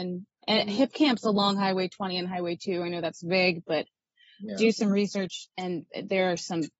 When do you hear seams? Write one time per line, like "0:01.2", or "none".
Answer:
0:05.5